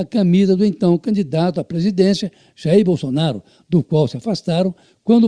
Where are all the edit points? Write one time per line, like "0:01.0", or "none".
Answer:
none